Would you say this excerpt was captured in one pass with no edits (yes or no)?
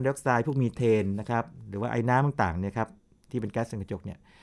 yes